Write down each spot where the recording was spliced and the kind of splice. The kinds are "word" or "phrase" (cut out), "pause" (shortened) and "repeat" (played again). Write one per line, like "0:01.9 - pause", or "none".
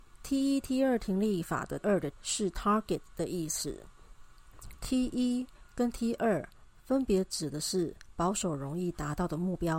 0:01.8 - phrase
0:02.1 - word